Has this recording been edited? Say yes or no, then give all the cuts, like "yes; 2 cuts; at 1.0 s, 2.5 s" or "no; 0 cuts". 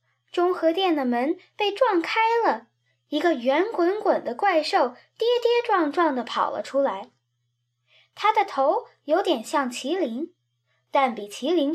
no; 0 cuts